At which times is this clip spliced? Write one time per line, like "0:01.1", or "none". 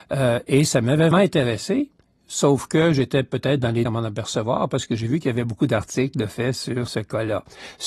0:01.1
0:03.8
0:06.9

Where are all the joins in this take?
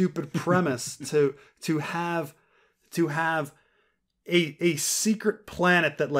none

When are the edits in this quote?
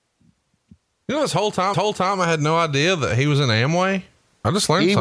0:01.7

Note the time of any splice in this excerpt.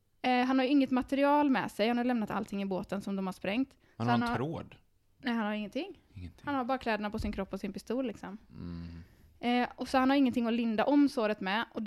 none

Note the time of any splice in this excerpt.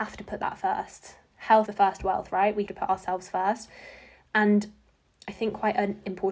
0:01.7
0:02.7

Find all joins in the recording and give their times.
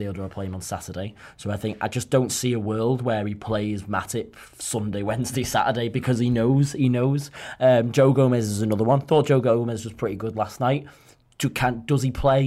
none

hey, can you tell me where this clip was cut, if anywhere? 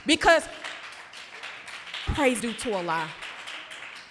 0:02.1
0:02.4

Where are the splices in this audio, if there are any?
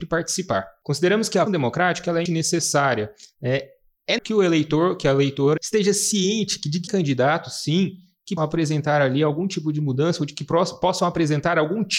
0:01.5
0:02.3
0:04.2
0:05.6
0:06.9
0:08.4

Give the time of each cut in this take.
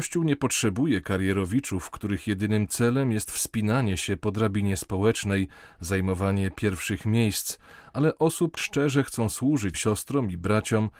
0:08.6
0:09.7

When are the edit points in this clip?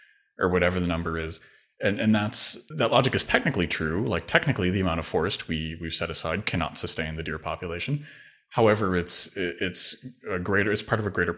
0:02.7

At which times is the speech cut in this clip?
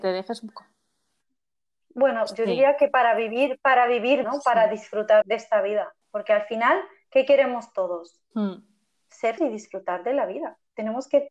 0:04.2
0:05.2
0:06.0
0:09.4

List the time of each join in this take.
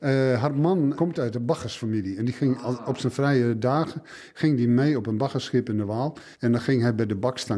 0:01.0
0:06.3

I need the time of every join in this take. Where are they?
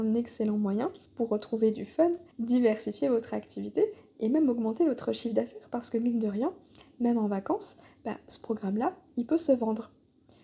0:01.1
0:02.3

